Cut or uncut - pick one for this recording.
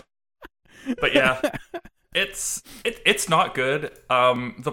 uncut